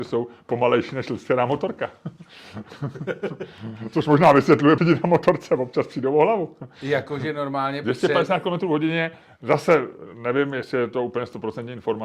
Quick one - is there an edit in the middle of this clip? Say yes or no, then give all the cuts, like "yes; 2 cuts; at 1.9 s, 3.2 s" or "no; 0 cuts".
yes; 1 cut; at 4.8 s